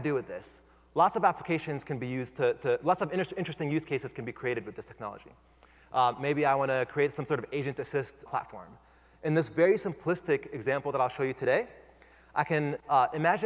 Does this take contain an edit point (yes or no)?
yes